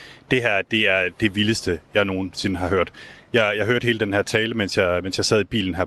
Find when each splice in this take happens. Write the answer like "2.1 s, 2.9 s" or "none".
none